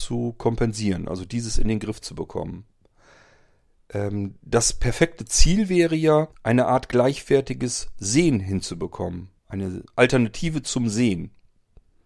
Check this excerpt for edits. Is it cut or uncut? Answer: cut